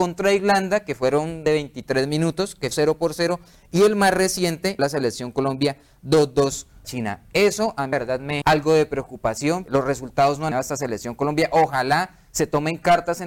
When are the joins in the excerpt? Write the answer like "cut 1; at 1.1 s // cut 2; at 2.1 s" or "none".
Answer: cut 1; at 1.5 s // cut 2; at 2.7 s // cut 3; at 4.8 s // cut 4; at 6.8 s // cut 5; at 7.9 s // cut 6; at 8.4 s // cut 7; at 9.7 s // cut 8; at 10.5 s